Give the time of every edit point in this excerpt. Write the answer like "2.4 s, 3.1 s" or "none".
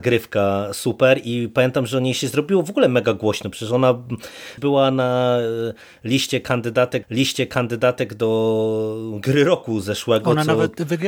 4.6 s, 7.0 s